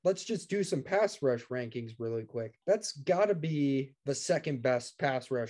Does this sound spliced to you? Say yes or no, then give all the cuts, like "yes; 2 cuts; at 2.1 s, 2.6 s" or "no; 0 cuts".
yes; 2 cuts; at 2.6 s, 4.0 s